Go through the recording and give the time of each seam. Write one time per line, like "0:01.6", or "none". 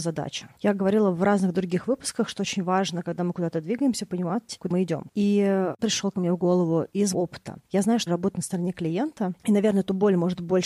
0:04.7
0:05.8
0:07.1
0:08.1